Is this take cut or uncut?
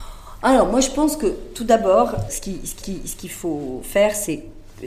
cut